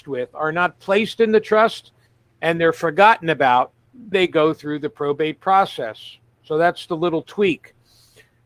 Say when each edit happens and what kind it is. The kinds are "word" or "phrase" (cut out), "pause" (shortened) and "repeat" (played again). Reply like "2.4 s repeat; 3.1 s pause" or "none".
2.1 s pause; 4.1 s word